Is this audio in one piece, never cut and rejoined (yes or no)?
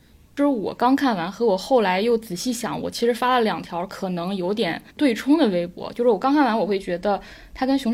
no